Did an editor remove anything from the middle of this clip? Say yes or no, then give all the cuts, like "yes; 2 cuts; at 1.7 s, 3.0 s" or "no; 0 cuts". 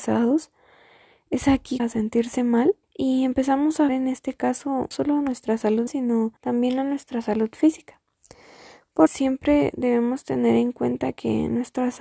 yes; 7 cuts; at 1.8 s, 2.8 s, 3.9 s, 4.9 s, 5.9 s, 6.4 s, 9.1 s